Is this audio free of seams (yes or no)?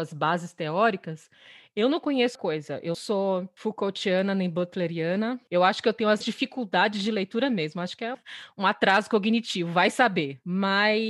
no